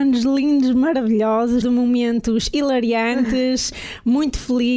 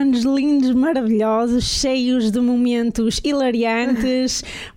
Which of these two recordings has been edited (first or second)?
first